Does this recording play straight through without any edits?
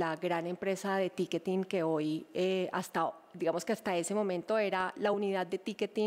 yes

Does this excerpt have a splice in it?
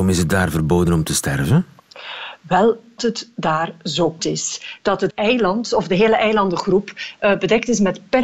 yes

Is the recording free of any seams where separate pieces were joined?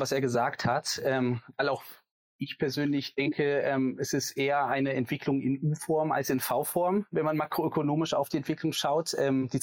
yes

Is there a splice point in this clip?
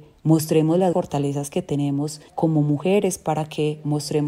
yes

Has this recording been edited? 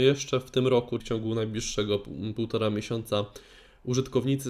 yes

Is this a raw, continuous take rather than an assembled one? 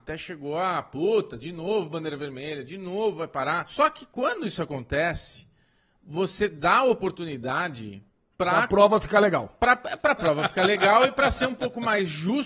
yes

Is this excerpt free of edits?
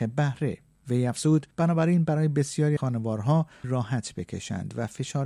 no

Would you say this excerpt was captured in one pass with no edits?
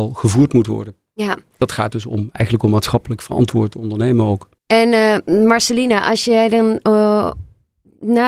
no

